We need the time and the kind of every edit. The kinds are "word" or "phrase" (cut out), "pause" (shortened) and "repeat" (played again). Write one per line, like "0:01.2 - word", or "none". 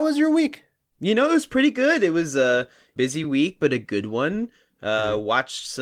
none